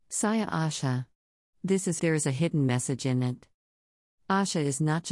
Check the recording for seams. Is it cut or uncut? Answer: cut